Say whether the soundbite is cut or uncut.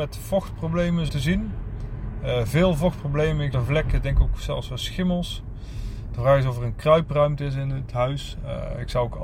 cut